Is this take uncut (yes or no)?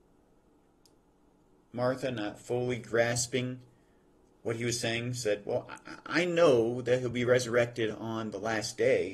yes